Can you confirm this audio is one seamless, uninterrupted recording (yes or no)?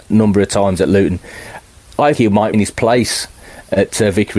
no